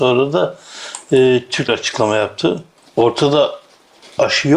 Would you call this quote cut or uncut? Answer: cut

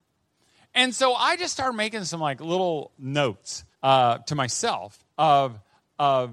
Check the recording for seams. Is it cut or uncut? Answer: cut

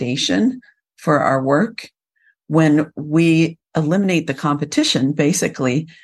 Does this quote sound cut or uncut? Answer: uncut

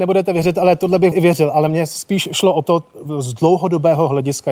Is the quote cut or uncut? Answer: cut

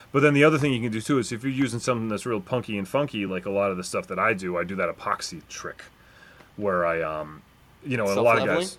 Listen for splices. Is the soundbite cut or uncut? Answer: uncut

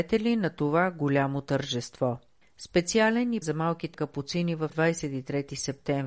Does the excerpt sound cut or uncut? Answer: cut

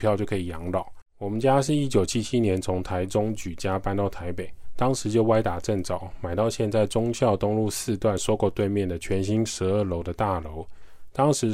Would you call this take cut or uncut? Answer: cut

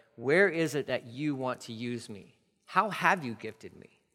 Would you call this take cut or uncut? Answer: uncut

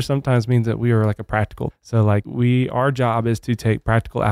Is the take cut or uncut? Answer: cut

